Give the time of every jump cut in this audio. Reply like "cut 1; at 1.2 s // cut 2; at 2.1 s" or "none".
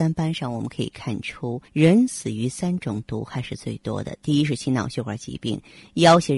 cut 1; at 1.7 s